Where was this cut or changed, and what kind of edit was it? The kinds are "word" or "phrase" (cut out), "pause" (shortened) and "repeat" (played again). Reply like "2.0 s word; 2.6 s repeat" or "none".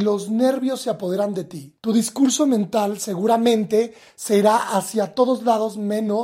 1.8 s pause